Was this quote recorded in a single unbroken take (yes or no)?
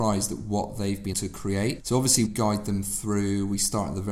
no